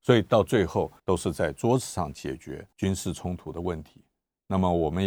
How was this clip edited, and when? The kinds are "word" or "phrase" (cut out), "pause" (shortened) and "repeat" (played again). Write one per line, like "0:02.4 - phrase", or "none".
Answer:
0:01.0 - pause
0:02.7 - pause